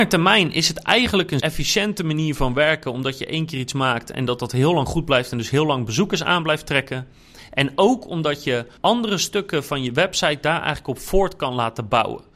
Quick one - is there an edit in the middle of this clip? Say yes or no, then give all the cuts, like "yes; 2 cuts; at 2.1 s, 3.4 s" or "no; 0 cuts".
yes; 2 cuts; at 1.4 s, 8.8 s